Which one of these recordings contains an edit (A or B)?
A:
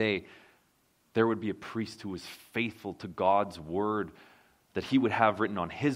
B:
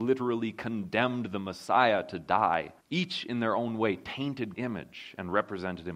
B